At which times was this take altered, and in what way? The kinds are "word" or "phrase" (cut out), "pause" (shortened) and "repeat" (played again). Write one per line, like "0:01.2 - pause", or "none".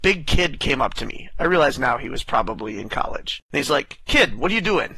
0:03.4 - pause